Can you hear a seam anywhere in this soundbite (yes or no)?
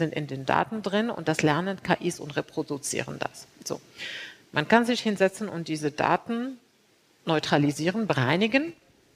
no